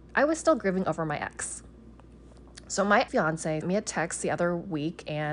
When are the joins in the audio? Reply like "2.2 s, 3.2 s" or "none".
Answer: 3.1 s, 3.6 s